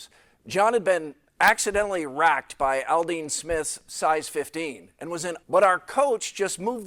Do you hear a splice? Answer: yes; 1 cut; at 5.4 s

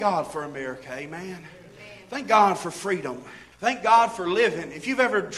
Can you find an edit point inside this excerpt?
yes; 1 cut; at 3.5 s

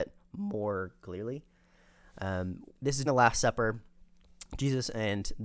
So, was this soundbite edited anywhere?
yes; 2 cuts; at 2.7 s, 3.1 s

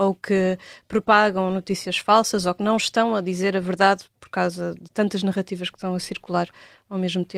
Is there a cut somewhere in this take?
no; 0 cuts

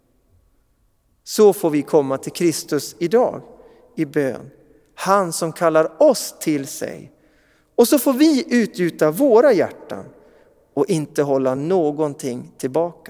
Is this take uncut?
yes; 0 cuts

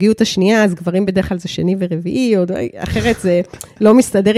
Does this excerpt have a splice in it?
no; 0 cuts

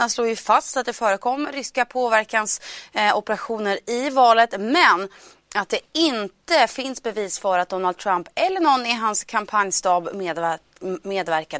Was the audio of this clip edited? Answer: no; 0 cuts

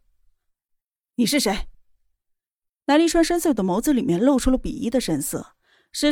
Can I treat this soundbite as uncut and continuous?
yes; 0 cuts

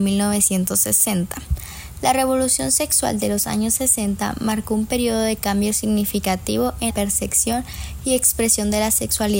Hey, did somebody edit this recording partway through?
yes; 1 cut; at 6.9 s

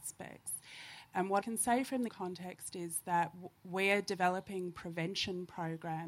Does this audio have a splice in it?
yes; 3 cuts; at 1.4 s, 2.1 s, 3.6 s

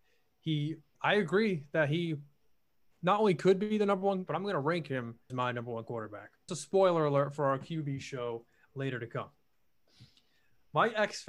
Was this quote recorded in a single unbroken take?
no; 4 cuts; at 0.9 s, 4.3 s, 5.3 s, 6.5 s

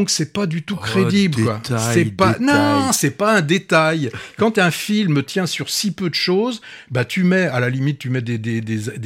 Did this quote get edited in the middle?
no; 0 cuts

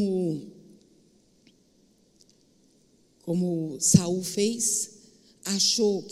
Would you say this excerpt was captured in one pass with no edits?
yes; 0 cuts

